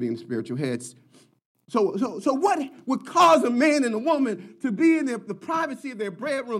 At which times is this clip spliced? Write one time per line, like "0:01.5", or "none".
none